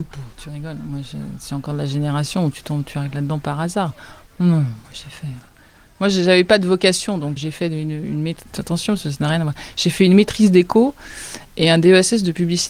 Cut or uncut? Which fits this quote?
cut